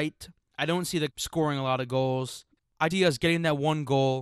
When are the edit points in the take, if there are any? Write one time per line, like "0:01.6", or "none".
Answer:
0:01.1
0:02.9